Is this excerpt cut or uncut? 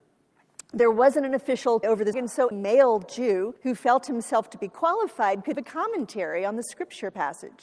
cut